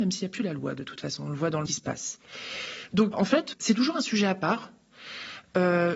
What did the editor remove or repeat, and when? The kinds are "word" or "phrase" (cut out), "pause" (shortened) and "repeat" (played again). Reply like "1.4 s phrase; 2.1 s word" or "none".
1.7 s phrase; 3.1 s word; 3.5 s word

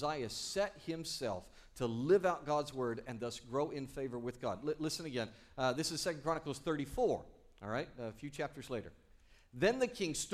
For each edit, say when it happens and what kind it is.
none

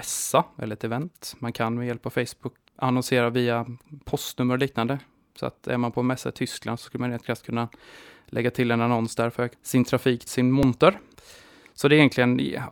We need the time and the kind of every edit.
2.7 s word; 9.5 s word; 10.3 s word

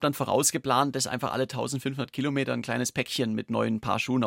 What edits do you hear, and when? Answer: none

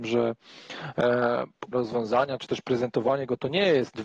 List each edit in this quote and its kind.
1.7 s word

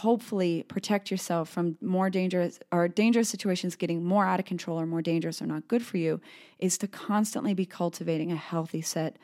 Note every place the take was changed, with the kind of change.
none

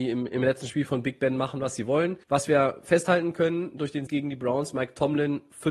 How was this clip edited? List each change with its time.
2.2 s pause; 4.1 s word

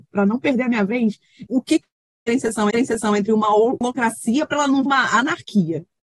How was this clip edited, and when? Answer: 1.5 s word; 2.7 s repeat; 4.9 s word

